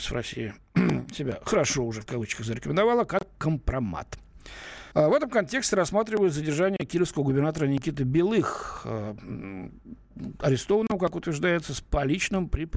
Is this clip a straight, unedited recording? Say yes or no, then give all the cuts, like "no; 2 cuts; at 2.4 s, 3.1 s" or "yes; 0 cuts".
no; 1 cut; at 4.9 s